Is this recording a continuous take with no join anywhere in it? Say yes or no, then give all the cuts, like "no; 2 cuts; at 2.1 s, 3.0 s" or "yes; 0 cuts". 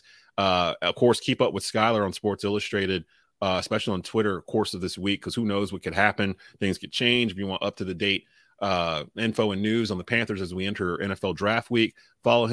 yes; 0 cuts